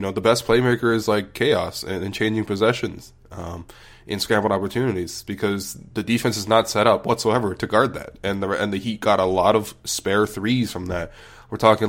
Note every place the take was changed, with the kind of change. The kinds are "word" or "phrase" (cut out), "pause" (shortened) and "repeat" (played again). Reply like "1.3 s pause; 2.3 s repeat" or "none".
none